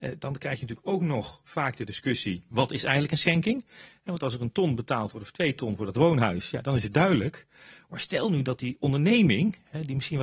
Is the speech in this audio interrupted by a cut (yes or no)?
no